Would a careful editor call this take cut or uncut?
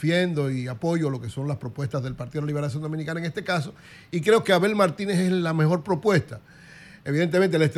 uncut